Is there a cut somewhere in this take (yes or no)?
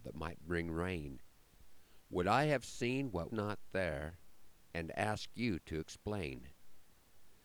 yes